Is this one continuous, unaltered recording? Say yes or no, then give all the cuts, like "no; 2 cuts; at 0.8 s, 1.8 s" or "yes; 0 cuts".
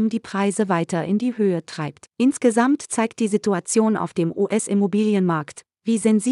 no; 1 cut; at 2.1 s